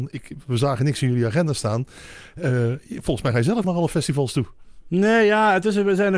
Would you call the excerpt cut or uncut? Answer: cut